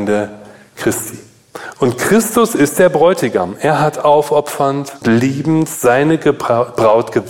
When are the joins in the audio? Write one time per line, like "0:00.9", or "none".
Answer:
0:05.0